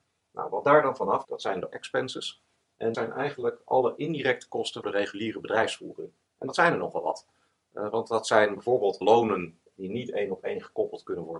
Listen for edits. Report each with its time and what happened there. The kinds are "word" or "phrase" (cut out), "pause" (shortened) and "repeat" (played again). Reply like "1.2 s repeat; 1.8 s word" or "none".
1.2 s word; 1.7 s word; 2.9 s word; 4.8 s word; 9.0 s word